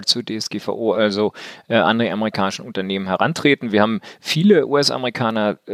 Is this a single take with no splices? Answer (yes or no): yes